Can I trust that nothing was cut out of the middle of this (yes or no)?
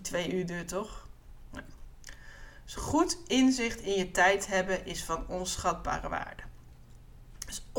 yes